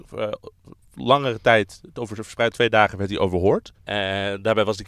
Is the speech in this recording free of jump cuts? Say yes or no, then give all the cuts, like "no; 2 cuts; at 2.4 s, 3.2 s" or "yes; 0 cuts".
no; 2 cuts; at 2.5 s, 3.8 s